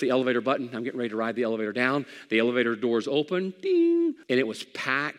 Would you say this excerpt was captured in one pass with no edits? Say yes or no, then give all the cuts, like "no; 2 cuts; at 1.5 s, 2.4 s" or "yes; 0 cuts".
no; 1 cut; at 4.2 s